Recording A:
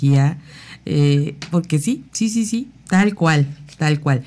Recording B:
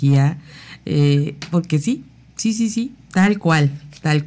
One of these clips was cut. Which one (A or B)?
A